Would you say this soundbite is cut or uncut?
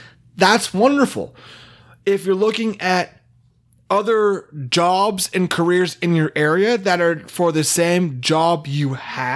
uncut